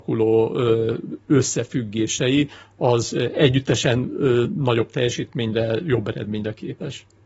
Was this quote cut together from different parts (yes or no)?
no